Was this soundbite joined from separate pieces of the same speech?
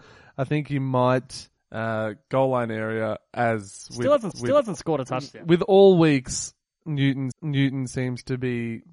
yes; 3 cuts; at 1.6 s, 4.3 s, 7.3 s

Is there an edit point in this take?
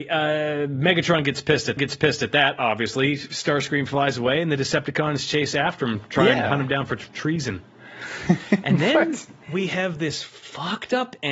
yes; 1 cut; at 1.8 s

